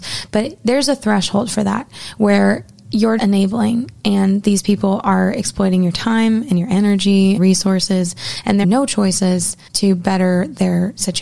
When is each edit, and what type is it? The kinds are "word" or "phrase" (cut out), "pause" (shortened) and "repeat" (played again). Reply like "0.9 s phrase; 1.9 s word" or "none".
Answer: 3.2 s word; 7.4 s phrase; 8.6 s word; 9.7 s pause